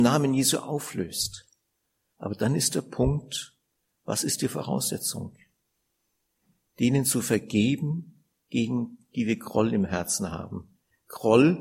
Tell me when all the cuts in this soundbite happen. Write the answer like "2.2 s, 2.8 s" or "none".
none